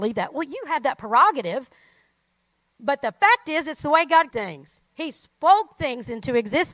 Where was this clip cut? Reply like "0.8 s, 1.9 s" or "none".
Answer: 4.3 s